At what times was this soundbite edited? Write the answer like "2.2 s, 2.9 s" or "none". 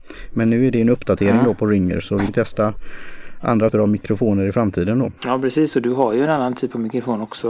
2.3 s, 3.7 s, 5.2 s